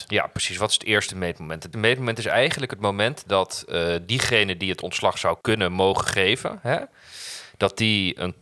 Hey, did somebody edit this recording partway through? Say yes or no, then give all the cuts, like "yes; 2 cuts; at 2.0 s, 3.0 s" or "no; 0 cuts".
yes; 2 cuts; at 1.7 s, 5.4 s